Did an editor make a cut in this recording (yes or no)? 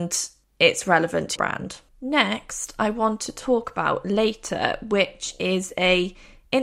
yes